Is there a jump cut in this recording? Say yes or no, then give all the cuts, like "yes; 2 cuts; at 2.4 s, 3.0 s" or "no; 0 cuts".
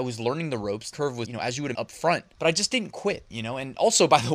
yes; 4 cuts; at 0.9 s, 1.2 s, 1.7 s, 2.3 s